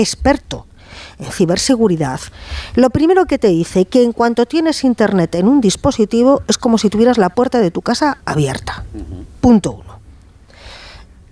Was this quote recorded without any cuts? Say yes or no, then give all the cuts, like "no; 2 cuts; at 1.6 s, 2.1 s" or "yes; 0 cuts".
yes; 0 cuts